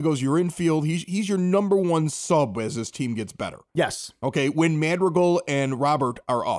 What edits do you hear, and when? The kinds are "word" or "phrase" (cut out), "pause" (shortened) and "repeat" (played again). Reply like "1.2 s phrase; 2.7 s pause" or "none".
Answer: none